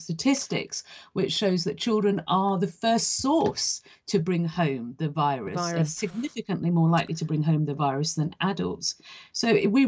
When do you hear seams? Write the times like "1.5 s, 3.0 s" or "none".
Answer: none